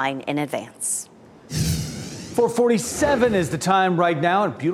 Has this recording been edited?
no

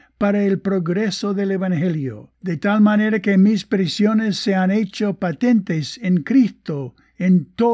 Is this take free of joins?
no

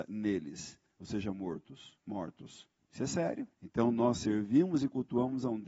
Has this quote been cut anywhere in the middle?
yes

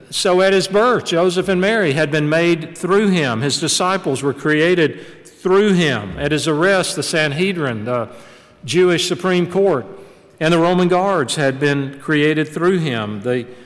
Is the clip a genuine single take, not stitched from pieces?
yes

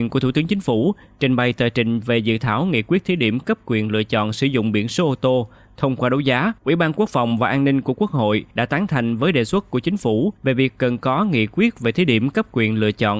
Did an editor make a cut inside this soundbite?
yes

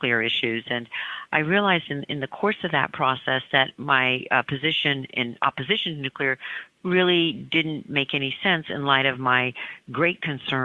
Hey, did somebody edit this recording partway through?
no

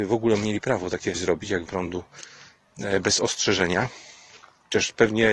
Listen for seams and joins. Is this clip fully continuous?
no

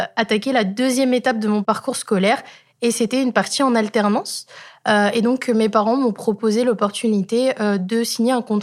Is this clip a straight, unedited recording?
yes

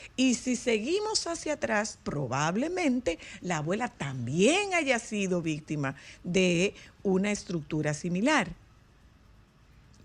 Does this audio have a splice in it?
no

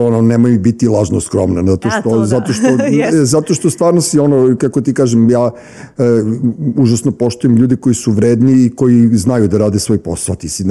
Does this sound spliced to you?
no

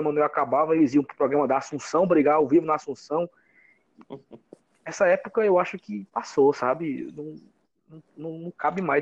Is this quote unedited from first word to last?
yes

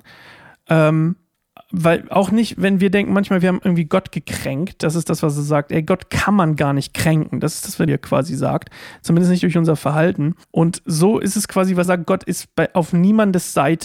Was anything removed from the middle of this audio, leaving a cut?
yes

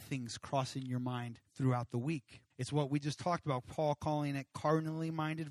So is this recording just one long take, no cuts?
no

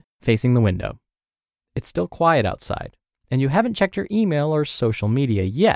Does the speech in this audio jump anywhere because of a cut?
no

